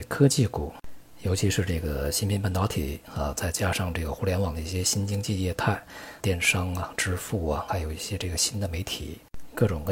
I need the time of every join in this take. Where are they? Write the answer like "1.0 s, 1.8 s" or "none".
6.2 s, 7.7 s